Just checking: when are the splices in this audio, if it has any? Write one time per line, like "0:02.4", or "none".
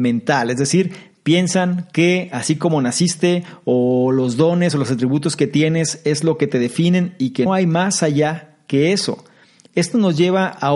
0:07.5